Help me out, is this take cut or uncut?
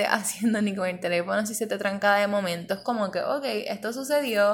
uncut